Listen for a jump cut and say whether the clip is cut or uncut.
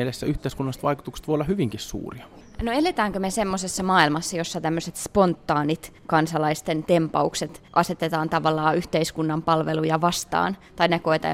cut